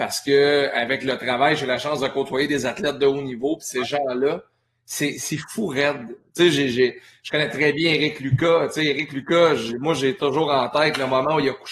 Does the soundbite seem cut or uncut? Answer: uncut